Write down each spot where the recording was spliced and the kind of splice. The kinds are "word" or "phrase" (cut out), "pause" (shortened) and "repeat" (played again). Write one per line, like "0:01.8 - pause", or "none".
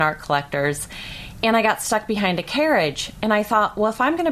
none